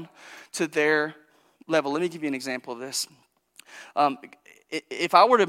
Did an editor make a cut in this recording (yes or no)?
no